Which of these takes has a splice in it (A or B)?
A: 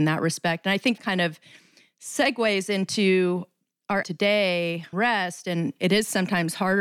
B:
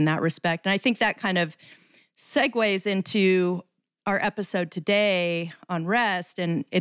A